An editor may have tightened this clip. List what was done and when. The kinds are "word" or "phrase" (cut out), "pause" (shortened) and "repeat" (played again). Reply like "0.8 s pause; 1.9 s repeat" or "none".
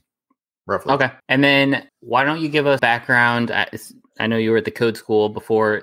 1.2 s pause; 1.9 s word; 2.8 s word